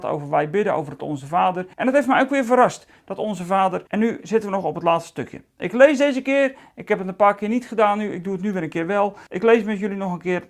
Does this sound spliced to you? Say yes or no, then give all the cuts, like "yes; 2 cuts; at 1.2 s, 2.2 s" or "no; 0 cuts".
yes; 3 cuts; at 1.7 s, 3.9 s, 9.3 s